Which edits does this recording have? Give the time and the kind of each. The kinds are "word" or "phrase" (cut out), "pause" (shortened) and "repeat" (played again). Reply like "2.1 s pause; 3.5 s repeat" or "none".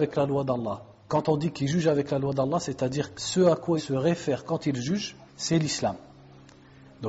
3.1 s word; 3.8 s word; 5.3 s pause